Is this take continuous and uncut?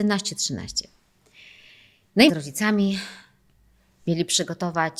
no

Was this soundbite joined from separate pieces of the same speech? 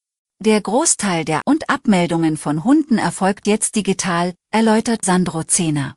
yes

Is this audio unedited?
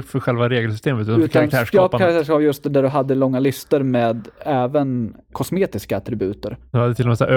yes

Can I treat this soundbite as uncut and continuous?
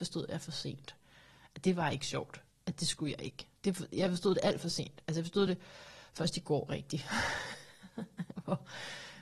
yes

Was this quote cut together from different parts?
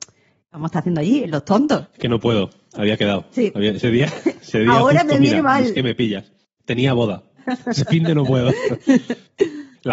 no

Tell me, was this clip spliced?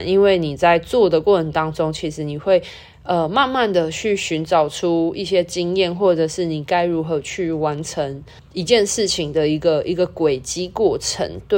yes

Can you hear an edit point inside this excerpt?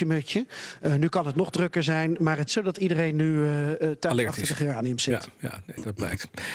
yes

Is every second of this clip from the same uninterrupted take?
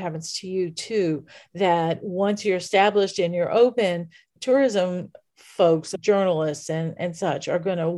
yes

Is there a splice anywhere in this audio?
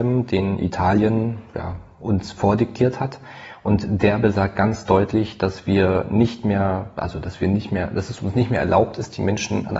no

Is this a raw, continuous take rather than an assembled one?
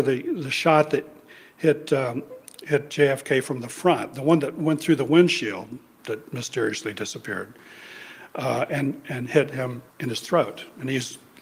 no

